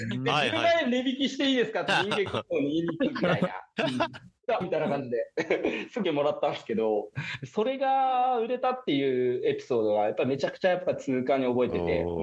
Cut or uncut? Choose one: cut